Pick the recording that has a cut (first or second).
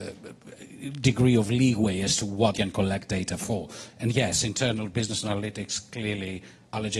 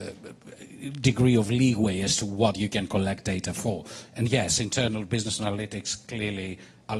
first